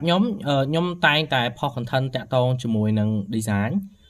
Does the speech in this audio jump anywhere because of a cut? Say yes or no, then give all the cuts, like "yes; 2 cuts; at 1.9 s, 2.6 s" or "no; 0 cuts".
no; 0 cuts